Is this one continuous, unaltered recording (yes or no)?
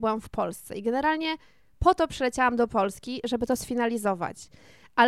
yes